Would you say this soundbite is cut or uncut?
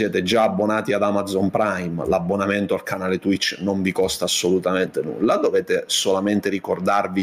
uncut